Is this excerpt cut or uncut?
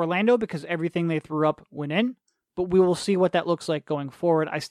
uncut